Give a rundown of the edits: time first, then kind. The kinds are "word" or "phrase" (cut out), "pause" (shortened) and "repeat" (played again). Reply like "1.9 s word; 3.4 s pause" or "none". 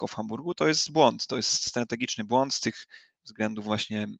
none

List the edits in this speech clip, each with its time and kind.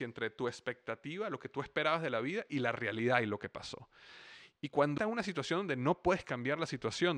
5.0 s phrase

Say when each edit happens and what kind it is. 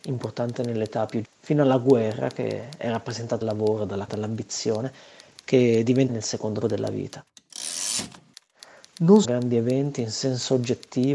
1.2 s word; 3.4 s word; 4.1 s word; 6.1 s word; 6.6 s word; 9.2 s word

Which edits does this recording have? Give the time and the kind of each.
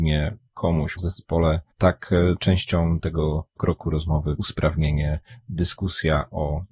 1.0 s word; 1.7 s pause; 3.6 s word; 4.4 s word

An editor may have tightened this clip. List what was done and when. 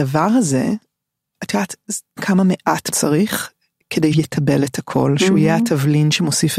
1.3 s word; 2.2 s word; 2.9 s word; 4.1 s word

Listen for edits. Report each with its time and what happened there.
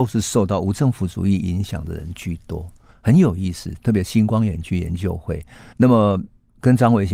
5.7 s word

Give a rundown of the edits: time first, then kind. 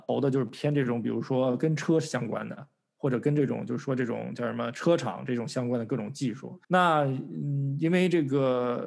6.6 s pause

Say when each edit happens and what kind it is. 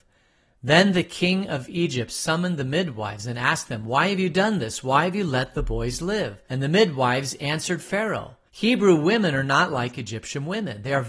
6.5 s pause; 8.5 s pause

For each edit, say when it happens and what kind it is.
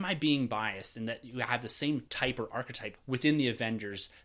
2.1 s pause; 3.0 s word

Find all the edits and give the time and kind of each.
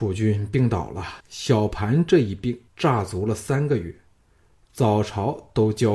1.2 s pause; 2.7 s pause

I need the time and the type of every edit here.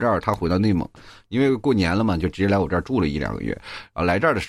none

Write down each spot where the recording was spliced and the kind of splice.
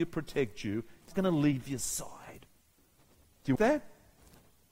1.1 s word; 3.6 s word

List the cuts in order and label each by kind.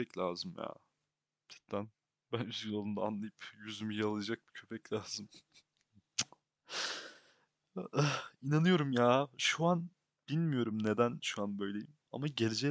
none

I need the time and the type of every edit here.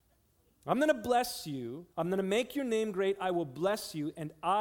1.9 s pause

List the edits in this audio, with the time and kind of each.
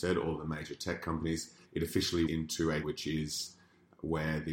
1.6 s pause; 2.3 s word; 2.8 s word

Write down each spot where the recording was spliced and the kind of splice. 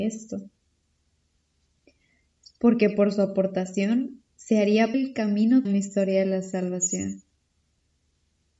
4.3 s pause; 4.9 s word; 5.6 s word

